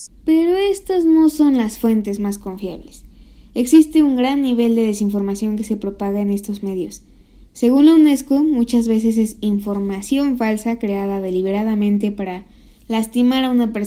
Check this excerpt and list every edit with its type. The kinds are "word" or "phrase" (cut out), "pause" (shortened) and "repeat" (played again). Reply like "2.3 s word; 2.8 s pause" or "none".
none

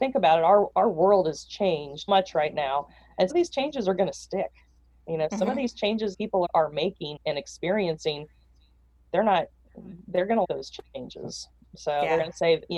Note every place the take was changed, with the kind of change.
2.1 s word; 3.3 s word; 6.1 s word; 6.4 s word; 7.2 s word; 10.4 s word

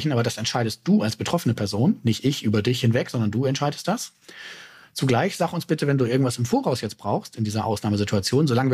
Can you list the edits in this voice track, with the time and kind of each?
none

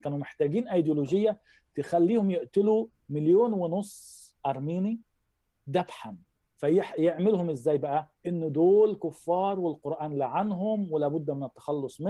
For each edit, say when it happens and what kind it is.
8.2 s pause

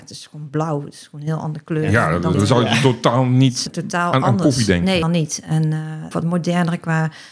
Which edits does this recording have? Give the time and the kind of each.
2.3 s word; 3.7 s word; 5.0 s word; 6.1 s word

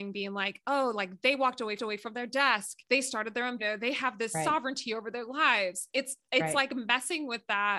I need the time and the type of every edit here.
1.8 s repeat; 2.8 s pause; 3.6 s phrase

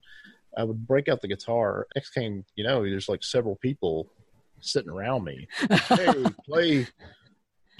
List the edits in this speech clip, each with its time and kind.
1.9 s word

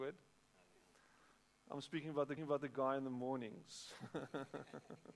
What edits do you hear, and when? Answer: 2.4 s repeat

